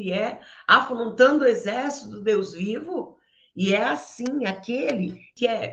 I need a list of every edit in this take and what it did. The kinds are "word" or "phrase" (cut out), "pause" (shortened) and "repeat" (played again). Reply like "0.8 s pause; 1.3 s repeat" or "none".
none